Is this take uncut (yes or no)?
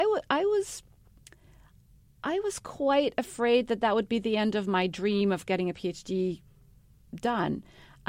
yes